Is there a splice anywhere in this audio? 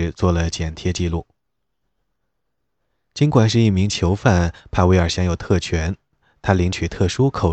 no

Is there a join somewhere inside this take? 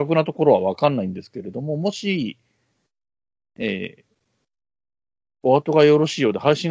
no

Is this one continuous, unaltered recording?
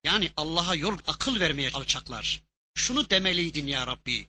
no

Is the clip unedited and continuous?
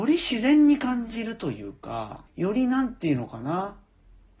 no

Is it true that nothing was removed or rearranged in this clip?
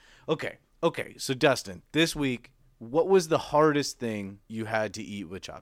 no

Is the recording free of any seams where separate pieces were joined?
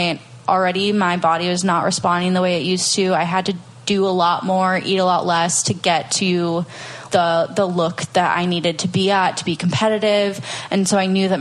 no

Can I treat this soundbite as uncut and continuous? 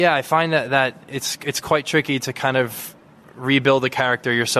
yes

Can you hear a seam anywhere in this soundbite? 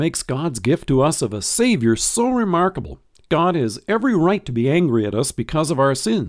no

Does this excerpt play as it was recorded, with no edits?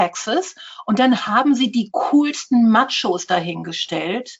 yes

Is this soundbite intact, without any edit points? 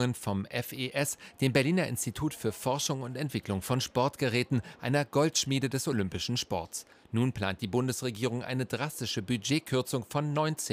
yes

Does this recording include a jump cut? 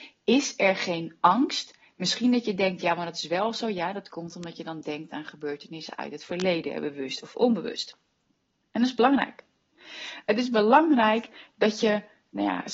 yes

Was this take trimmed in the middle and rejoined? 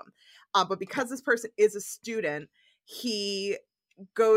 no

